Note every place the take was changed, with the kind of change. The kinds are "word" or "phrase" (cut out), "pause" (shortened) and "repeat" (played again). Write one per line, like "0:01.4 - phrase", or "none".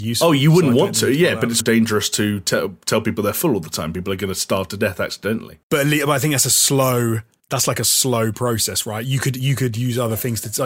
0:01.6 - word
0:05.6 - pause
0:07.4 - pause